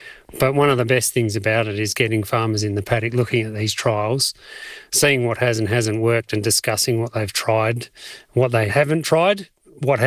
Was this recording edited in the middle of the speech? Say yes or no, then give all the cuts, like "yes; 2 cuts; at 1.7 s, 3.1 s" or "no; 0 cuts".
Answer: no; 0 cuts